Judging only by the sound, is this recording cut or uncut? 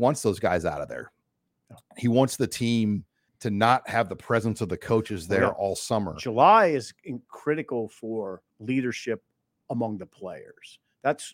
cut